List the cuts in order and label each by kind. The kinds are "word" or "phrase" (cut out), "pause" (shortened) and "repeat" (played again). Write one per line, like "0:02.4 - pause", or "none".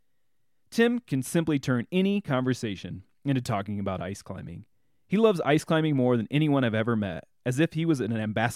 none